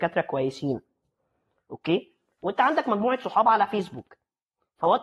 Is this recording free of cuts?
yes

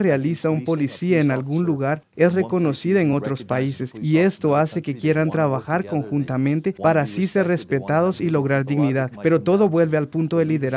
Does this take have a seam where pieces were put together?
no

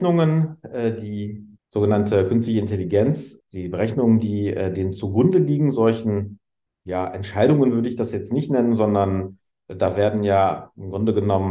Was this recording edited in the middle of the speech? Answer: no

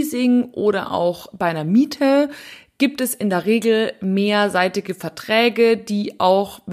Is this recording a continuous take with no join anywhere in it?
yes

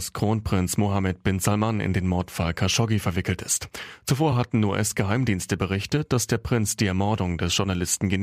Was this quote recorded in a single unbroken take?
yes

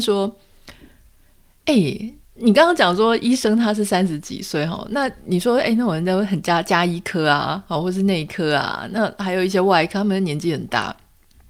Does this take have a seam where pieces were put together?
no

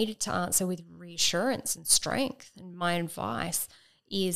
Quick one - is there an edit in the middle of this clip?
no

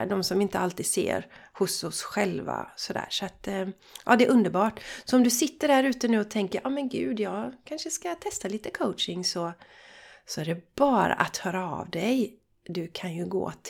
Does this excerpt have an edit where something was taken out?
no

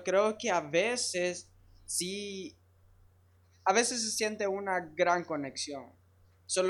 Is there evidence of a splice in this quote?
no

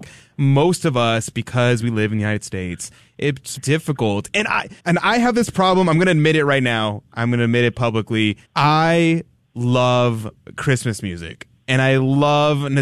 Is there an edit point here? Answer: yes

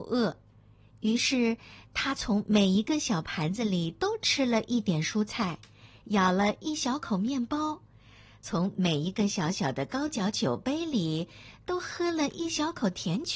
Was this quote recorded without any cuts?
yes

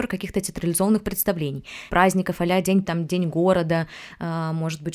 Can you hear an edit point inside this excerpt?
yes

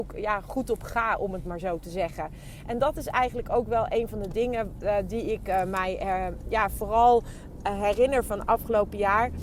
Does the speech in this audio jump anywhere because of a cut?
no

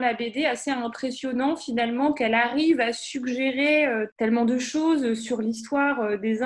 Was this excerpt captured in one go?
yes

